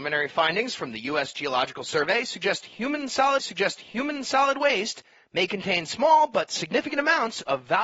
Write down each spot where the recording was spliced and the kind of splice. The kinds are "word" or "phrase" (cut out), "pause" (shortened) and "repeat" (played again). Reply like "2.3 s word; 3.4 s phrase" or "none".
3.4 s repeat